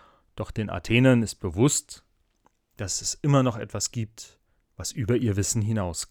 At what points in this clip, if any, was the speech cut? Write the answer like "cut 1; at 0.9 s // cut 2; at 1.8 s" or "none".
none

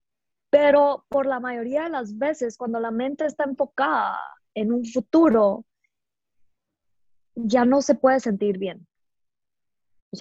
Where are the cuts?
none

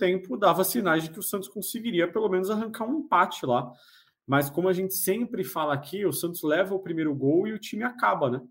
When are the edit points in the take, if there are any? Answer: none

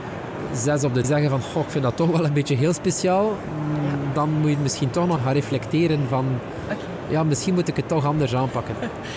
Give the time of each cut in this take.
cut 1; at 1.0 s // cut 2; at 5.2 s

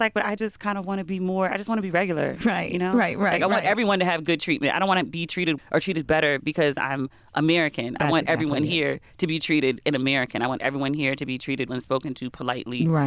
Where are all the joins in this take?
cut 1; at 5.6 s // cut 2; at 9.8 s // cut 3; at 11.7 s

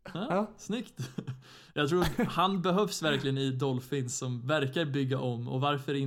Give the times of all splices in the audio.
none

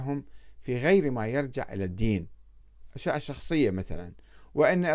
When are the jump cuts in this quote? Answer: none

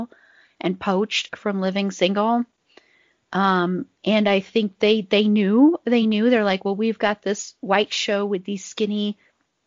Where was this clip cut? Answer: none

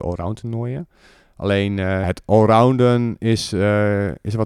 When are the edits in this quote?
cut 1; at 2.0 s

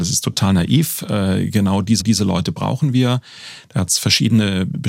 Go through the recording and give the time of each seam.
cut 1; at 2.0 s

